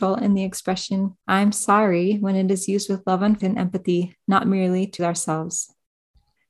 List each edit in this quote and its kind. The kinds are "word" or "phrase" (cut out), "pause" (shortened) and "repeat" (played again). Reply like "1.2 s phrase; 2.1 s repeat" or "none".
3.4 s word; 5.0 s word